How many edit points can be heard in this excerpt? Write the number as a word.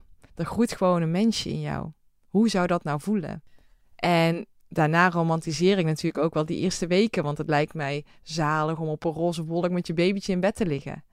zero